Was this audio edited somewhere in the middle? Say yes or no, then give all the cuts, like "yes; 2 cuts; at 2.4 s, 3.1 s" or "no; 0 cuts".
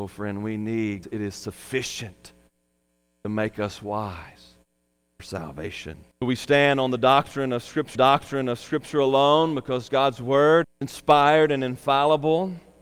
yes; 4 cuts; at 1.0 s, 6.1 s, 7.9 s, 10.6 s